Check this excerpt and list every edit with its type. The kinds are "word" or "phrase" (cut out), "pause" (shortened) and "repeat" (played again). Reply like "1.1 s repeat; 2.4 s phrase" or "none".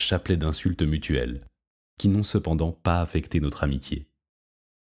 none